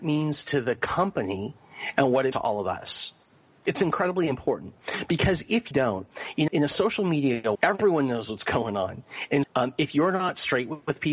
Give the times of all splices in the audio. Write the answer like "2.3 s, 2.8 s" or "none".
2.3 s, 5.7 s, 6.5 s, 7.5 s, 9.4 s